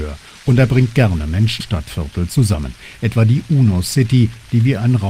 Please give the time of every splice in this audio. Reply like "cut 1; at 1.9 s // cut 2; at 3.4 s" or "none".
cut 1; at 1.6 s